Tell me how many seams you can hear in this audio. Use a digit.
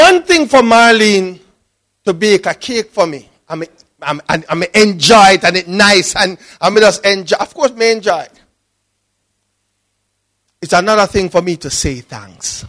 0